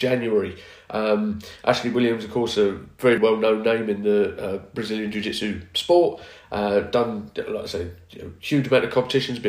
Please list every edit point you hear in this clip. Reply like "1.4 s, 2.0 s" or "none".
3.2 s